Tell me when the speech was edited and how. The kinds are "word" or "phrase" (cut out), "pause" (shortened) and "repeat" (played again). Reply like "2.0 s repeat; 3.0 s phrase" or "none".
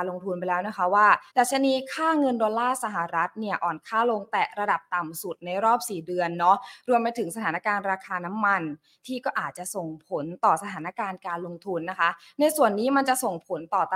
1.3 s pause